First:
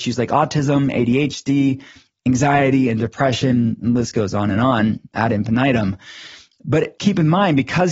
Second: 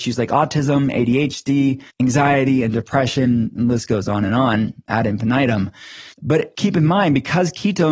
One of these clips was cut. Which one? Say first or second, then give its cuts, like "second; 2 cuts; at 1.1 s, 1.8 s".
second; 2 cuts; at 1.9 s, 6.1 s